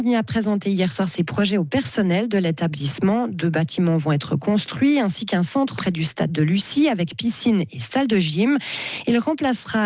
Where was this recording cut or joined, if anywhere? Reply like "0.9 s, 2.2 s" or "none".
5.8 s